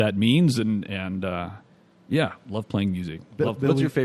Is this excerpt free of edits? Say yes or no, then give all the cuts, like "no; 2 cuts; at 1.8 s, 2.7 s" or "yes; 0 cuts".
yes; 0 cuts